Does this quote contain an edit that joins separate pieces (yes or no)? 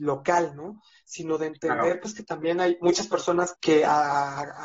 yes